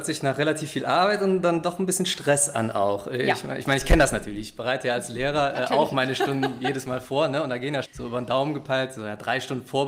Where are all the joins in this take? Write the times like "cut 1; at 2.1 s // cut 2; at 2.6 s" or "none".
cut 1; at 7.8 s